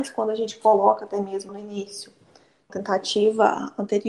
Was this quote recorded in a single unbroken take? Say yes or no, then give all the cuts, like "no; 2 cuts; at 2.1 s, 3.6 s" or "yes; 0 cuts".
no; 2 cuts; at 1.5 s, 2.7 s